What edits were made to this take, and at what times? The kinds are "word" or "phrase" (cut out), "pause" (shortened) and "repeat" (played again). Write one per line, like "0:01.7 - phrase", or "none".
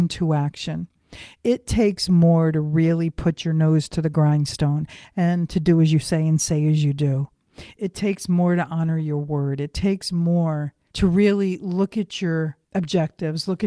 0:10.9 - pause
0:12.6 - pause